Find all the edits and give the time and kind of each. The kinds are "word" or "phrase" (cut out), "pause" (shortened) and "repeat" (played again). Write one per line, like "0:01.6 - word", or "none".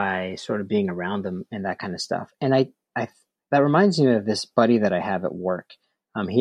none